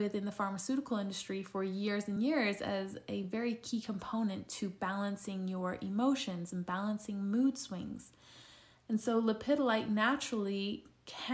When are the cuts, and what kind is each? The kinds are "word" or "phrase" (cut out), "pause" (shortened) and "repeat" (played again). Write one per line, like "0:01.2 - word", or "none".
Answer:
none